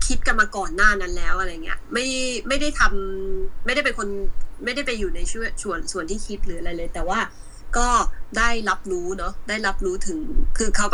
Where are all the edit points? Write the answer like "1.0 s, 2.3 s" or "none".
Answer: none